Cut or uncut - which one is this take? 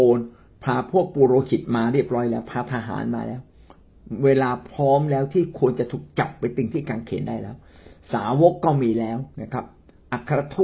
cut